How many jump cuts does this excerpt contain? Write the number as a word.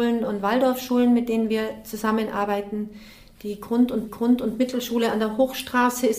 one